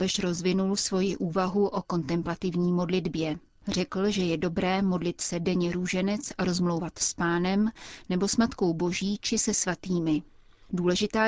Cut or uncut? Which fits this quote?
uncut